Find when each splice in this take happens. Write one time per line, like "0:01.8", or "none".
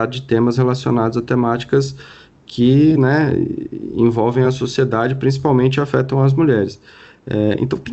none